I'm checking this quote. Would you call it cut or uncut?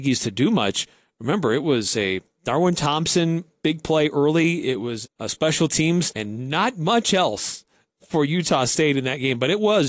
cut